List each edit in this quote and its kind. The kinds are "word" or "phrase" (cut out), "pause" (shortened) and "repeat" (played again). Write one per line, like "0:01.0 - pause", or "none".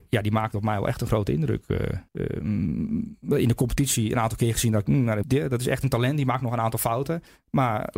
0:02.1 - pause
0:05.2 - word